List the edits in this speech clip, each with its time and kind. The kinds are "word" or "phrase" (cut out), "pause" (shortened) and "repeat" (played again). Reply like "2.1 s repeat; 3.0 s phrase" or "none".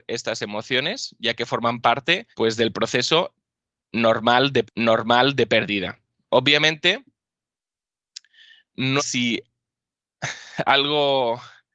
2.3 s pause; 4.6 s repeat; 9.0 s phrase